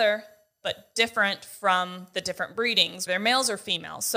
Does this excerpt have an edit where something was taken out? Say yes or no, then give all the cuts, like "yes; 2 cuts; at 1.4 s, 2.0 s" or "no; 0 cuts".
yes; 1 cut; at 3.1 s